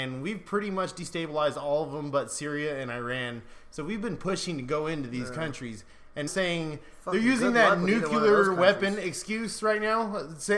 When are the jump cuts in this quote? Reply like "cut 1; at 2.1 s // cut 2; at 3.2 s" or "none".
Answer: cut 1; at 6.3 s